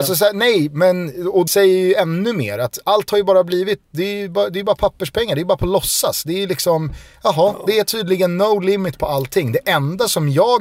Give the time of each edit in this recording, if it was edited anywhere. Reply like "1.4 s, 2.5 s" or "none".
1.5 s